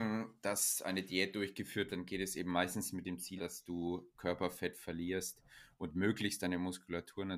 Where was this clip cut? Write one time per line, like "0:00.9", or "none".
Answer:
0:01.9
0:03.4